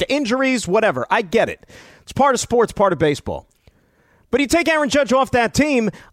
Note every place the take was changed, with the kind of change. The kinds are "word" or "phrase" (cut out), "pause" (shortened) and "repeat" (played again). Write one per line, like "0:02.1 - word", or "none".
none